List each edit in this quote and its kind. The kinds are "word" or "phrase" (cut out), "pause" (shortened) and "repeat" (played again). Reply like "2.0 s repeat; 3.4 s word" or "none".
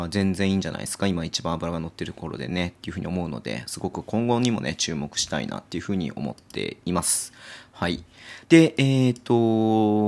8.4 s pause